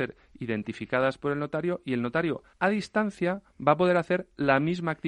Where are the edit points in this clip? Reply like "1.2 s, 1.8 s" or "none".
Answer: 2.5 s